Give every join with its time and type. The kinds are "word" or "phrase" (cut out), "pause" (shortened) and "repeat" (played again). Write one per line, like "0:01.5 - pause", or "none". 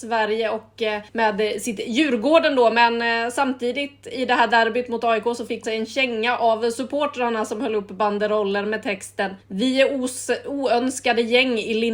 0:01.1 - pause
0:05.6 - word
0:09.4 - pause